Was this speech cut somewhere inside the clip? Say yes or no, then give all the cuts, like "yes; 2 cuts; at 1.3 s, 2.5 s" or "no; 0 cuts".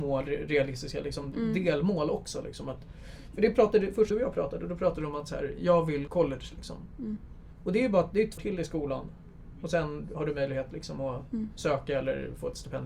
yes; 3 cuts; at 4.1 s, 6.1 s, 8.4 s